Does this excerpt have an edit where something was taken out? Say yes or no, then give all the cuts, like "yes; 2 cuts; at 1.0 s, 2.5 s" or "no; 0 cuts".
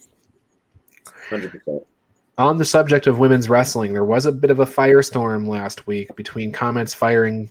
no; 0 cuts